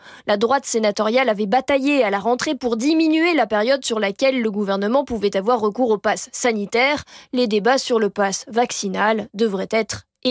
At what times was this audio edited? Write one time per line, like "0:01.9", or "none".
none

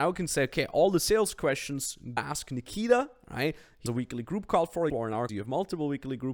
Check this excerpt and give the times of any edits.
0:02.2
0:03.9
0:04.9
0:05.3

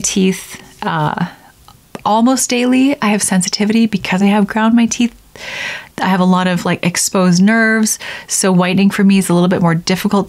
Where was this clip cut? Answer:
none

